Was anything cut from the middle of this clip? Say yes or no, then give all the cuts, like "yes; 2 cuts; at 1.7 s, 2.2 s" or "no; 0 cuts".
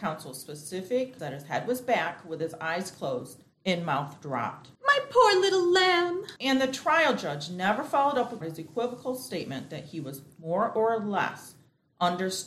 yes; 4 cuts; at 1.2 s, 4.8 s, 6.4 s, 8.4 s